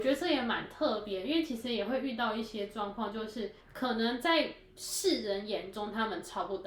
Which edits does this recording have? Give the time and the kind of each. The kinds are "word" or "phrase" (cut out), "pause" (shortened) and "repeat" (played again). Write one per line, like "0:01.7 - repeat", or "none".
0:03.6 - pause